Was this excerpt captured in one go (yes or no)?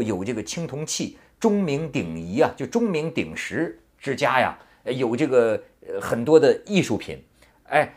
yes